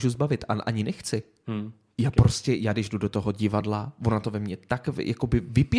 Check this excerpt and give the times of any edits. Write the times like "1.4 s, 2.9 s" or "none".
none